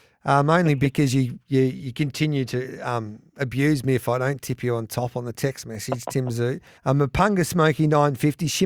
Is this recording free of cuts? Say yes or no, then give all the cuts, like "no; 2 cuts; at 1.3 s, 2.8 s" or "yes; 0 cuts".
no; 1 cut; at 6.8 s